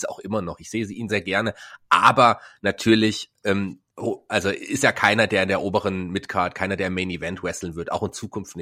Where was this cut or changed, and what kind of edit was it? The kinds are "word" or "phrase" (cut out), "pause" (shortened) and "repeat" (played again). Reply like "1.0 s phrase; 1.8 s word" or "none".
1.1 s word; 3.9 s pause